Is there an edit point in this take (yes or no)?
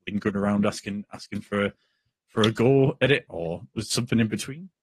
no